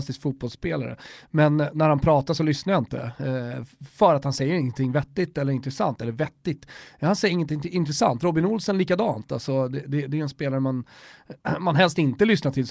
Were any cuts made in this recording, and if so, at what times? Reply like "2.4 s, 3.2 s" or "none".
none